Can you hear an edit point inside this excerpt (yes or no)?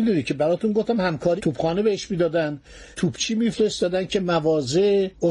yes